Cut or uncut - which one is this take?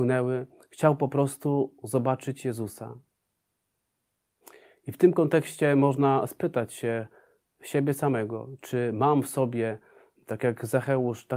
uncut